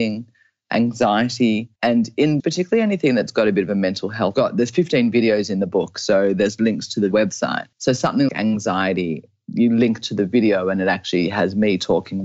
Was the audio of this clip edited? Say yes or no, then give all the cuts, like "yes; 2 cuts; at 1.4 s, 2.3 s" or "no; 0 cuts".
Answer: yes; 6 cuts; at 1.8 s, 2.4 s, 4.3 s, 7.1 s, 7.7 s, 8.3 s